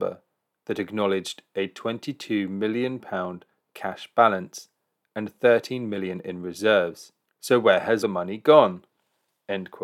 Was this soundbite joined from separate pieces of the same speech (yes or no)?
yes